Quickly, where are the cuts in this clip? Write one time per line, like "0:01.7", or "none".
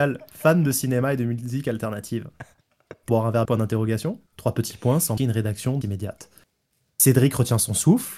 0:03.1
0:03.4
0:04.3
0:05.2
0:05.8